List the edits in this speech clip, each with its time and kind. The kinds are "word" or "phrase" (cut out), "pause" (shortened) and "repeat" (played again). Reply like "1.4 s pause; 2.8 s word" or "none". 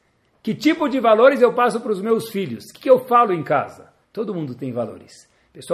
4.0 s pause

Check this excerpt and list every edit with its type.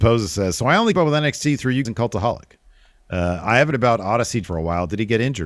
0.9 s word; 1.8 s word; 3.7 s word; 4.4 s word

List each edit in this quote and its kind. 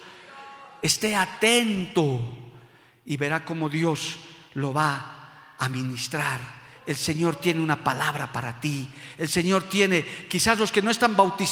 none

